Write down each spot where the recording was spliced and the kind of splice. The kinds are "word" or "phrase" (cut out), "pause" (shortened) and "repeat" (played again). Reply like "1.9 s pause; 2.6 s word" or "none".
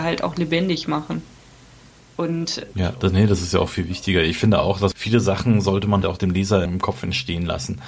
4.9 s word; 6.0 s word; 6.7 s word